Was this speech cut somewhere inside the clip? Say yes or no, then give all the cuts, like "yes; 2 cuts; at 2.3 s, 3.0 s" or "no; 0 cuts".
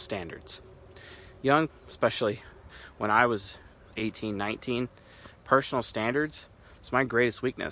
yes; 2 cuts; at 1.7 s, 3.9 s